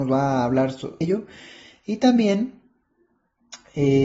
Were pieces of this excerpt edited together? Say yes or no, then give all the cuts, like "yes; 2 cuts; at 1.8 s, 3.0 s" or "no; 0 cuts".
yes; 1 cut; at 1.0 s